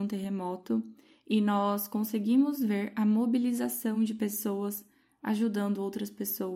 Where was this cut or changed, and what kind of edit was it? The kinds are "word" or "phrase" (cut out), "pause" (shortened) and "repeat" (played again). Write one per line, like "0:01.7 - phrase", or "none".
none